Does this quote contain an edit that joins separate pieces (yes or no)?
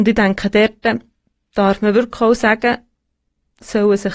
no